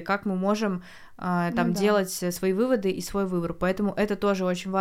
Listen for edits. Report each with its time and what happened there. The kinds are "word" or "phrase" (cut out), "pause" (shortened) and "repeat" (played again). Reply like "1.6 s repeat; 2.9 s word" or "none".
none